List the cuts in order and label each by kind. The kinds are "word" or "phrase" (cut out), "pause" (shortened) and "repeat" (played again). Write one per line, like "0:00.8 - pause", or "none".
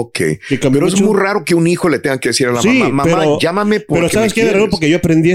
none